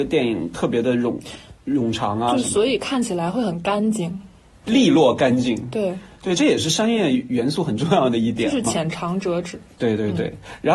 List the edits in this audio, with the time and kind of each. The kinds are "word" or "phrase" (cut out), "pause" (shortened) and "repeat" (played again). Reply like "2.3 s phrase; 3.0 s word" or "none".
4.6 s word